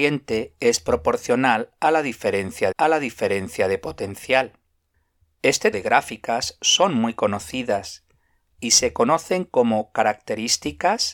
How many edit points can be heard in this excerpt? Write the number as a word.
two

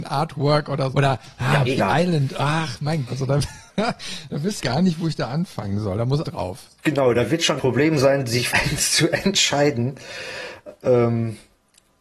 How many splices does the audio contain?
nine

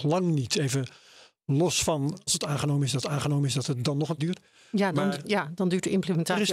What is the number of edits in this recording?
three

